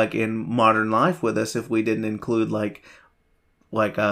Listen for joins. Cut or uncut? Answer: uncut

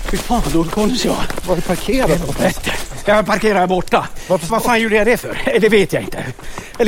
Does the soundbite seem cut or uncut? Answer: cut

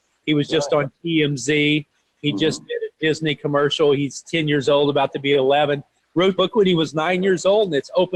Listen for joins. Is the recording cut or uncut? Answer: cut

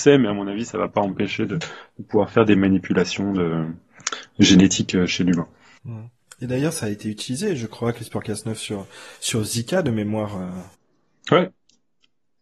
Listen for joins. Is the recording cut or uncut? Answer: uncut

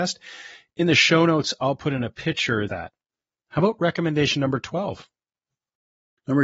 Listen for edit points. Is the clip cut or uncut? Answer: cut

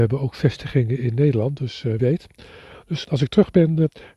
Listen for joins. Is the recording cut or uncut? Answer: cut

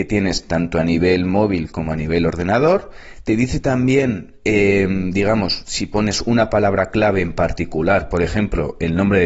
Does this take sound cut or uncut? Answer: uncut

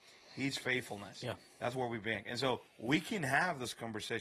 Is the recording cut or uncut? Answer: cut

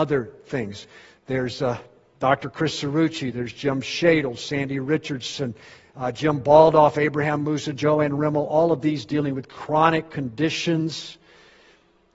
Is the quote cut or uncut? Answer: uncut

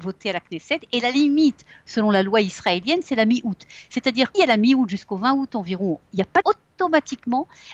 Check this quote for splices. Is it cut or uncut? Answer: cut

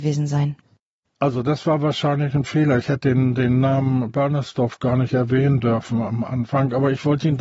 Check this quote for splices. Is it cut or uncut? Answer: uncut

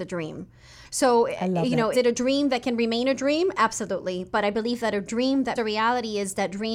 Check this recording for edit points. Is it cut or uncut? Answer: cut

